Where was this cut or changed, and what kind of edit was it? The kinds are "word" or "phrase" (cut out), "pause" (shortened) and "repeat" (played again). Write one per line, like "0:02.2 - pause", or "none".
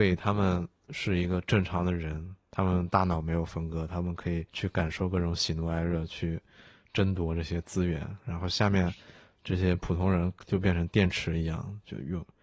0:04.5 - pause